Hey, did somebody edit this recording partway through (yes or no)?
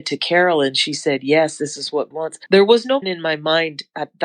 yes